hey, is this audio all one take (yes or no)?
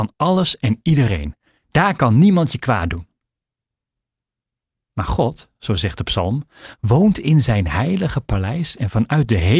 yes